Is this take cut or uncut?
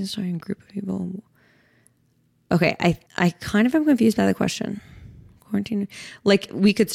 cut